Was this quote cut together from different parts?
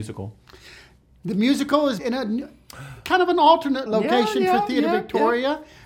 yes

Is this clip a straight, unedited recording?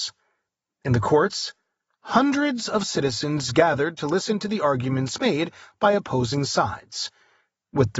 yes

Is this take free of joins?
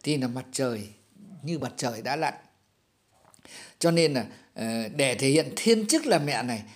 yes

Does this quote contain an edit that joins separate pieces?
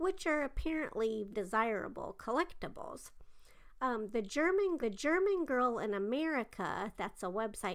yes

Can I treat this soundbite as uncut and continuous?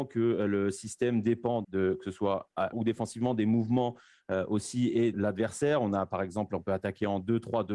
no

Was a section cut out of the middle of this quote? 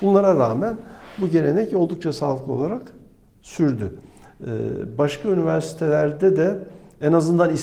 no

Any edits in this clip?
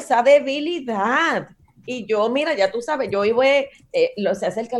no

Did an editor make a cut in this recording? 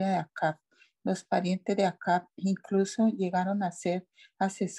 no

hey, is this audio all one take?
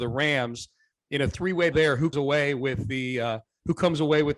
no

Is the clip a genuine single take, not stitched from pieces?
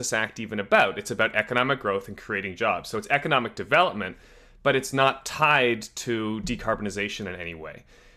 yes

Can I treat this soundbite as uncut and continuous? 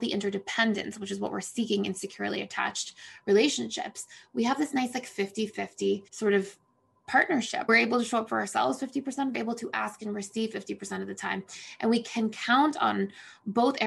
no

